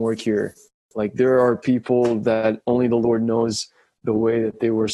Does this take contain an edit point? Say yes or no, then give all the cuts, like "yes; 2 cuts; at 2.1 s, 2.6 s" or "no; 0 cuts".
no; 0 cuts